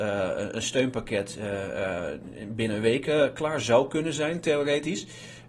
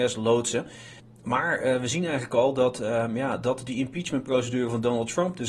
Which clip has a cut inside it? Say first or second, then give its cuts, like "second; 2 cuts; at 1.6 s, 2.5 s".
second; 1 cut; at 1.0 s